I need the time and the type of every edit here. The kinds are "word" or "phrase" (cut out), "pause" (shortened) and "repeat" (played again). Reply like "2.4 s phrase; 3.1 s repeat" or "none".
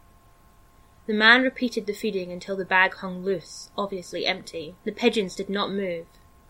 4.8 s pause